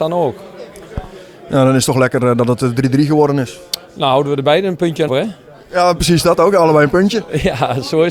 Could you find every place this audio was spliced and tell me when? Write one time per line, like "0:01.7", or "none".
0:05.1